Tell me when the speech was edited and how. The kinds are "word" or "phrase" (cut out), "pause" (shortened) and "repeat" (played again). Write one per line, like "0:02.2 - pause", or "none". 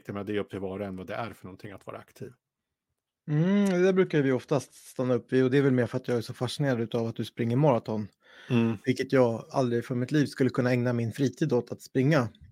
none

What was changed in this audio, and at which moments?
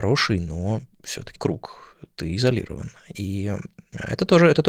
0:01.4 - word

